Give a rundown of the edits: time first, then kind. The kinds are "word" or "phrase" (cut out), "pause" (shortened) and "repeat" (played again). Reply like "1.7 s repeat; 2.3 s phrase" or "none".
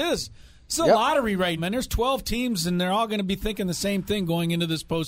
1.6 s word